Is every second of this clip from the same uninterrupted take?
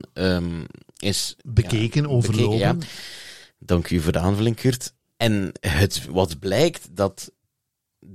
yes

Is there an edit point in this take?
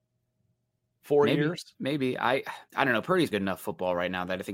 yes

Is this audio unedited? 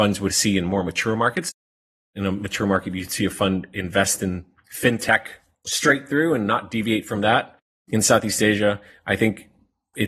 yes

